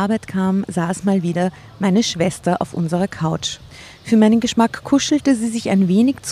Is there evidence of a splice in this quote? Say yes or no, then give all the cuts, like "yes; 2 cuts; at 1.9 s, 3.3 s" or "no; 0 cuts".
no; 0 cuts